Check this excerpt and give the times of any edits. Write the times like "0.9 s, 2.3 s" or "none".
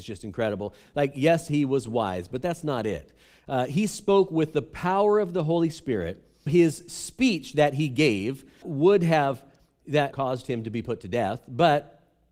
6.5 s, 8.6 s, 9.8 s, 10.1 s